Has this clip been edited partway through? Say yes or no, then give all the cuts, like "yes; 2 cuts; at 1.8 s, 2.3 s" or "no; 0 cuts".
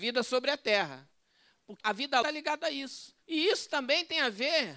yes; 3 cuts; at 1.8 s, 2.2 s, 3.2 s